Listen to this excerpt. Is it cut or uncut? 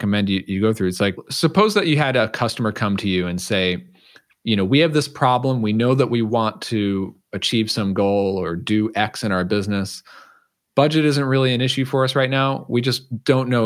uncut